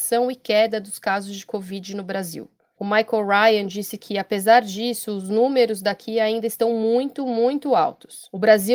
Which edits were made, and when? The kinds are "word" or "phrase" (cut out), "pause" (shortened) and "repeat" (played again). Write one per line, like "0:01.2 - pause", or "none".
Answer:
none